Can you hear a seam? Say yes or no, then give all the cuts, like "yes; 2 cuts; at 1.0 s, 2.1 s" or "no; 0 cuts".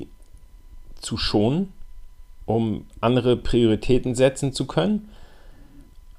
no; 0 cuts